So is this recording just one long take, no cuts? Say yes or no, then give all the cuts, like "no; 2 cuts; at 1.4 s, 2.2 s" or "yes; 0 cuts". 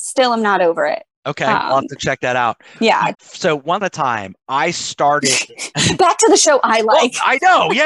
no; 3 cuts; at 2.7 s, 3.1 s, 3.8 s